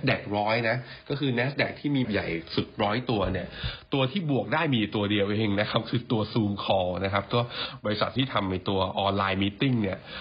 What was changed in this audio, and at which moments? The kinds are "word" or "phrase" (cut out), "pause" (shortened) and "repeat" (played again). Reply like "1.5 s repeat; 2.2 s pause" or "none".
2.0 s phrase; 8.2 s word

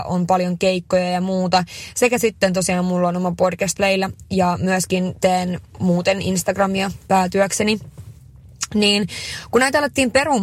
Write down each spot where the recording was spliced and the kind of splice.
3.8 s phrase

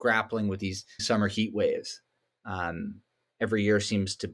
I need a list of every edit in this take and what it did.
1.0 s word

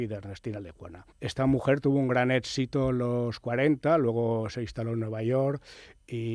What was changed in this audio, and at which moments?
1.1 s pause

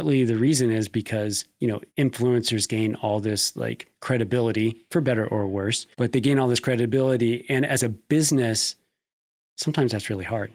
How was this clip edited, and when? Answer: 1.9 s pause; 5.9 s pause

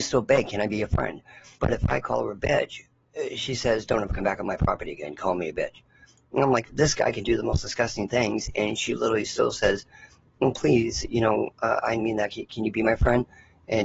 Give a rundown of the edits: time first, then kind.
1.5 s pause; 12.0 s phrase

